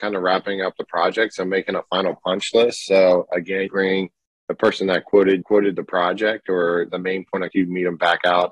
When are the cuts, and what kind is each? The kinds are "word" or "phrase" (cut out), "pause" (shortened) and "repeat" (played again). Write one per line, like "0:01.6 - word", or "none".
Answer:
0:03.7 - word
0:05.4 - word
0:06.9 - word
0:07.5 - word

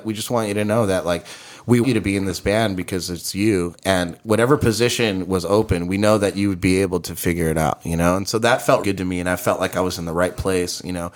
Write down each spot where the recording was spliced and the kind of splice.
0:01.8 - word
0:08.8 - word

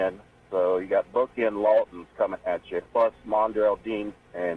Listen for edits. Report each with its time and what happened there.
0:02.9 - pause

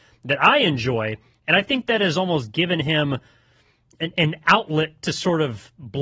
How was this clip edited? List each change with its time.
none

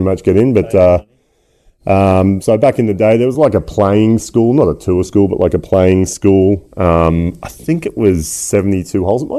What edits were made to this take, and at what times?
none

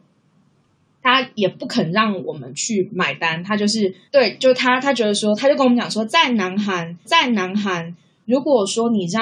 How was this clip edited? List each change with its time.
0:04.0 - pause
0:07.0 - repeat

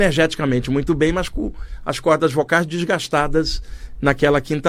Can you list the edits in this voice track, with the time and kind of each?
none

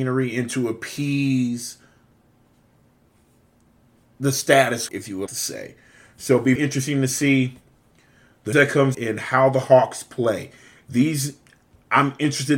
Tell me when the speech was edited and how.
0:04.9 - word
0:05.3 - word
0:06.6 - word
0:08.5 - word
0:08.9 - word

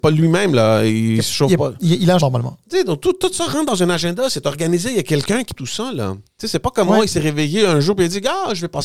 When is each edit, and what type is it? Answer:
0:02.2 - word
0:05.6 - word

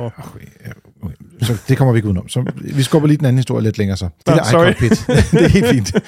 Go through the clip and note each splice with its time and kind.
0:04.2 - pause

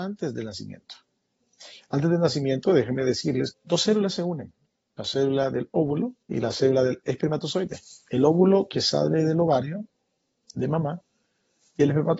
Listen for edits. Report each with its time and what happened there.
0:03.5 - word
0:06.2 - pause

